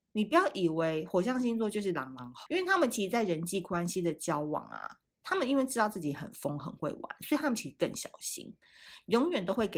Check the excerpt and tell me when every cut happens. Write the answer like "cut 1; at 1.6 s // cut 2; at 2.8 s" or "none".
cut 1; at 2.5 s